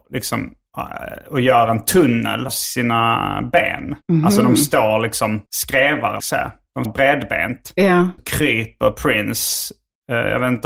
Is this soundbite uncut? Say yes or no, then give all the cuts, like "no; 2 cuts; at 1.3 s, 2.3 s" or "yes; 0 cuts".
no; 6 cuts; at 2.5 s, 4.0 s, 5.5 s, 6.2 s, 6.8 s, 8.2 s